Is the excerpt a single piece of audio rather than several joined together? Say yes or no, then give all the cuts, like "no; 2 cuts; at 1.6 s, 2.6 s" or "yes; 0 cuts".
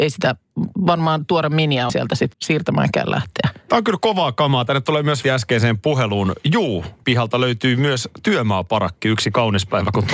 no; 4 cuts; at 1.9 s, 2.3 s, 5.2 s, 7.0 s